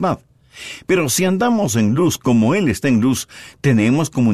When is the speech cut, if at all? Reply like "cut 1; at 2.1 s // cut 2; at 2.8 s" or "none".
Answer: none